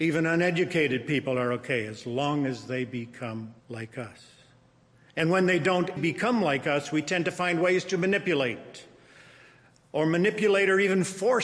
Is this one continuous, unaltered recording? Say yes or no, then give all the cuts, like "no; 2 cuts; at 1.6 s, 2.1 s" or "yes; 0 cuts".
no; 2 cuts; at 3.6 s, 6.0 s